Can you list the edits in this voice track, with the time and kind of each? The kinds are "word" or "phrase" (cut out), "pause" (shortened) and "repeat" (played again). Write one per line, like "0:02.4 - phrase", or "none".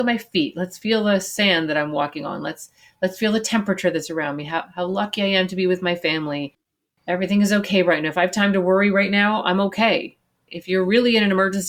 none